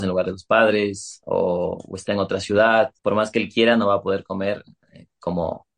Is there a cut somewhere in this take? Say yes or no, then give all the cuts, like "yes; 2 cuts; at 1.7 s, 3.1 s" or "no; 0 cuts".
yes; 1 cut; at 3.0 s